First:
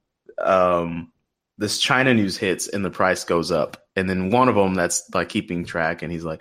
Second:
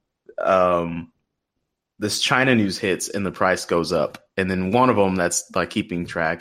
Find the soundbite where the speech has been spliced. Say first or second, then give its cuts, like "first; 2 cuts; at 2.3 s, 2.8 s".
first; 1 cut; at 1.2 s